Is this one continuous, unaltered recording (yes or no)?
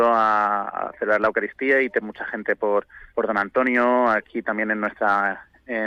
no